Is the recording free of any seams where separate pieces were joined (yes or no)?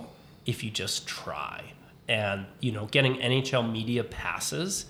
yes